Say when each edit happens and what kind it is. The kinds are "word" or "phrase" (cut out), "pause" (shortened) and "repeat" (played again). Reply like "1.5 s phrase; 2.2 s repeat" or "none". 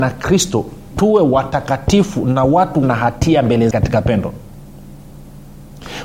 0.9 s word; 2.8 s word; 3.7 s word